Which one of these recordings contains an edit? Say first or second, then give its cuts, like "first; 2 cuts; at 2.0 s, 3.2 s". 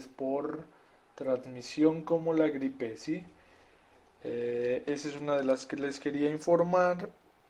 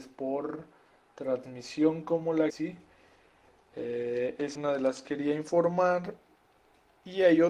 second; 3 cuts; at 2.5 s, 4.5 s, 5.0 s